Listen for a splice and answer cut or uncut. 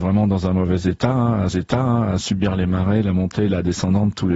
cut